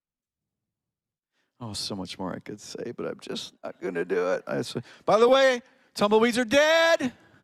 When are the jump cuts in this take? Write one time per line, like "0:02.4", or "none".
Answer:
none